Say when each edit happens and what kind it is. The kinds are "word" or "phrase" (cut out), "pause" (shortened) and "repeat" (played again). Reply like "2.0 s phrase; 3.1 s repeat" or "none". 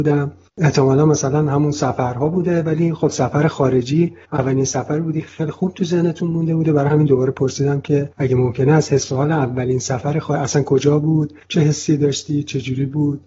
4.2 s pause; 8.1 s pause; 11.4 s pause